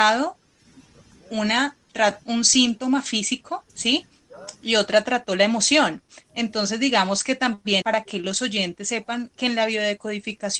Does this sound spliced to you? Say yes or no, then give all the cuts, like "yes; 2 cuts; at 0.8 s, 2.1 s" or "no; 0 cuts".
yes; 3 cuts; at 2.2 s, 3.7 s, 7.8 s